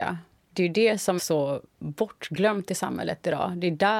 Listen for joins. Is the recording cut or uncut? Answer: cut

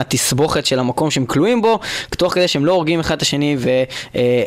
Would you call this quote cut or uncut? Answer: uncut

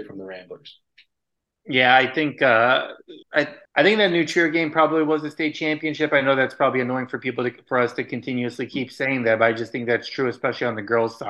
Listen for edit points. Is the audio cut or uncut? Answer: cut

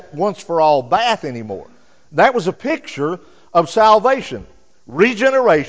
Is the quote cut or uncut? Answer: uncut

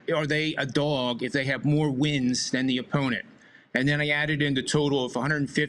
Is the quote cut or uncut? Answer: uncut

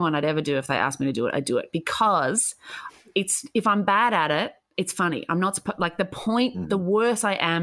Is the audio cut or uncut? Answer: uncut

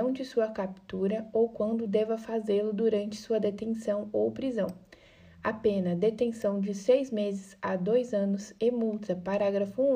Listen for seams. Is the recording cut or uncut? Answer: uncut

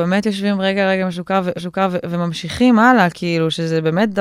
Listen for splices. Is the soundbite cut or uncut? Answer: cut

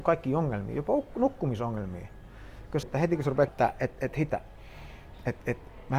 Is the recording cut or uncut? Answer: cut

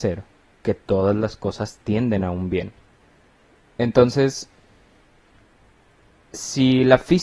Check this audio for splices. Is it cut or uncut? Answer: uncut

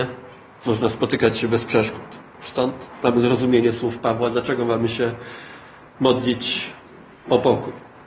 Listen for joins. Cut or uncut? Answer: uncut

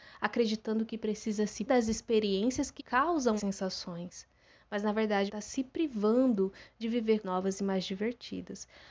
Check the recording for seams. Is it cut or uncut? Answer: cut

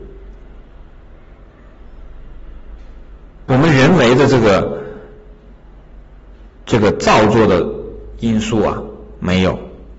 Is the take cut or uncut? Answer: uncut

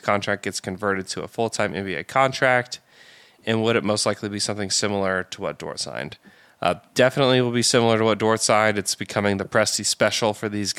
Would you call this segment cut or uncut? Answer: uncut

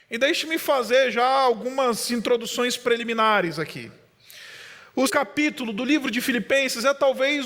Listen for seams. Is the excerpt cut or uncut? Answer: cut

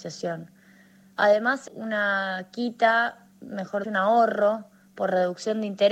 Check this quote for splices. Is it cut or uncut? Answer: cut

